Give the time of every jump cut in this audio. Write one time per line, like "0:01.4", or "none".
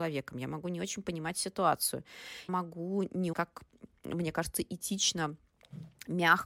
0:02.5
0:03.3